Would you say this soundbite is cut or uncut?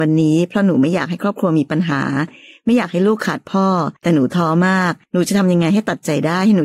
cut